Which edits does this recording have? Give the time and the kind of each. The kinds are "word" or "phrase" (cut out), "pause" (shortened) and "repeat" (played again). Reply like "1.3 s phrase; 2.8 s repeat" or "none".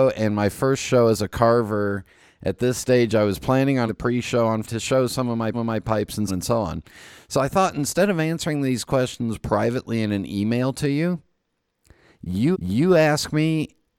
3.9 s word; 4.6 s word; 5.5 s repeat; 6.3 s word; 12.5 s repeat